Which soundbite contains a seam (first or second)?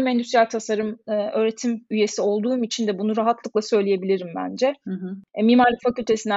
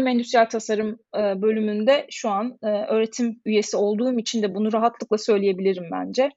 first